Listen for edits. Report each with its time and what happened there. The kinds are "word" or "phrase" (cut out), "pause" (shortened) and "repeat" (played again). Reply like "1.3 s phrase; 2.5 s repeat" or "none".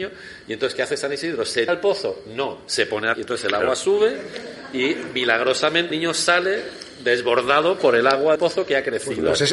1.7 s word; 3.1 s word; 5.9 s word; 8.4 s word

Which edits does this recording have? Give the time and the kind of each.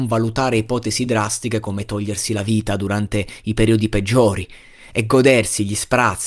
none

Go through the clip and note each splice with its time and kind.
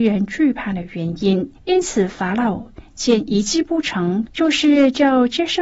1.6 s pause; 4.3 s phrase

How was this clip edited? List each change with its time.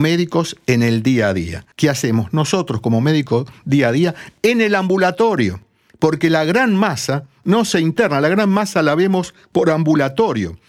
1.7 s pause

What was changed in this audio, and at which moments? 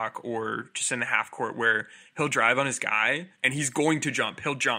3.3 s pause

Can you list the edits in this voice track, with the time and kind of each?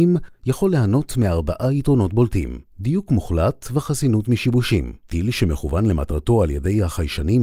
2.7 s pause; 5.0 s pause

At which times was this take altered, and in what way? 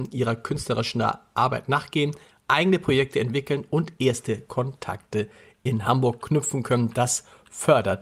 none

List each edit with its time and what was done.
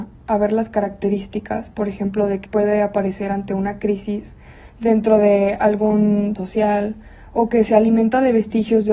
2.5 s word; 4.7 s pause; 6.4 s word

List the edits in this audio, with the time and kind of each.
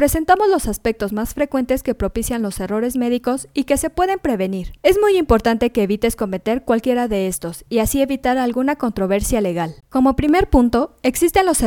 4.8 s pause; 9.8 s pause

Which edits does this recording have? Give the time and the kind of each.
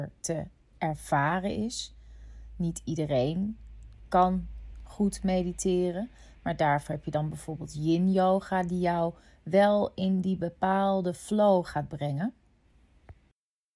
none

